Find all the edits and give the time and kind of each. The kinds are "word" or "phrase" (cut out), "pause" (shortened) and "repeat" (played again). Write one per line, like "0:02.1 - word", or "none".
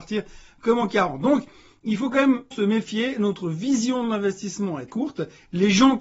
0:02.5 - word
0:04.9 - word